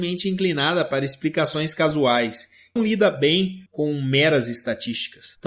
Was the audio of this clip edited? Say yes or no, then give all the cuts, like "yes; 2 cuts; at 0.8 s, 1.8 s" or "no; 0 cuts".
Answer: yes; 2 cuts; at 2.8 s, 3.7 s